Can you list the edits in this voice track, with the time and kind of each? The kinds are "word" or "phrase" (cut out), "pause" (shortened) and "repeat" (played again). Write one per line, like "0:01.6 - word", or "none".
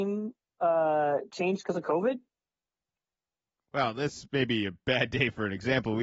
none